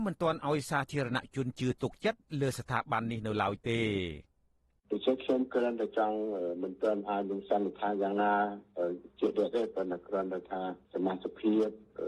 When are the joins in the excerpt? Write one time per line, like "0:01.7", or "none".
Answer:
none

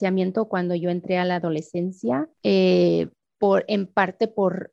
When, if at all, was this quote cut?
0:02.3

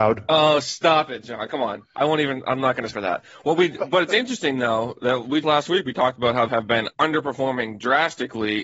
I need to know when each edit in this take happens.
0:02.9
0:05.4
0:06.5
0:06.9

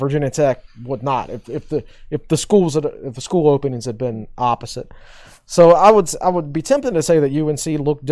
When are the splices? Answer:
none

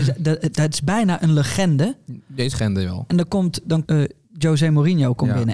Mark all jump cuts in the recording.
0:02.5
0:03.8

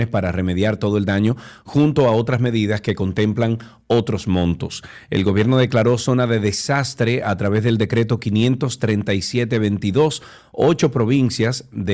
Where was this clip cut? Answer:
none

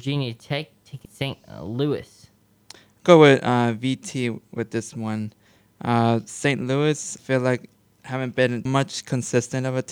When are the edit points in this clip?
0:01.0
0:03.0
0:07.2
0:08.7

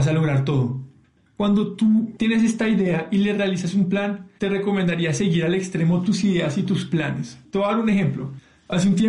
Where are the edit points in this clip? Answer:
none

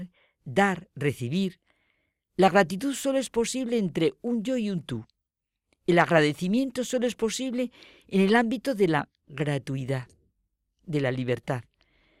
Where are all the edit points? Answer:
none

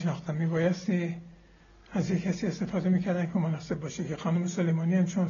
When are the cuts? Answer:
none

